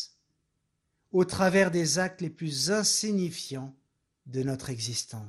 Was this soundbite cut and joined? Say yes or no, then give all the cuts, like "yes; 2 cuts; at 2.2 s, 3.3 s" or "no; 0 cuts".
yes; 1 cut; at 4.1 s